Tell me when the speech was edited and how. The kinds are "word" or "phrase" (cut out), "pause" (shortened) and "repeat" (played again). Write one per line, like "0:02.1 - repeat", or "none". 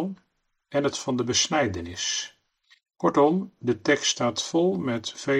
0:00.9 - word
0:02.6 - pause